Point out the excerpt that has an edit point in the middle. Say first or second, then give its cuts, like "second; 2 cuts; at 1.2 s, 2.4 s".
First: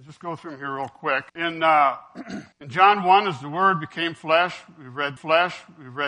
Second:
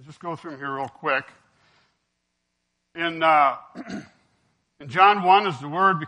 first; 3 cuts; at 1.3 s, 2.5 s, 5.2 s